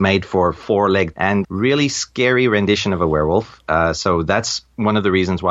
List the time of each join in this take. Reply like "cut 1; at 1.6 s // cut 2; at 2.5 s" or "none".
cut 1; at 1.1 s // cut 2; at 1.4 s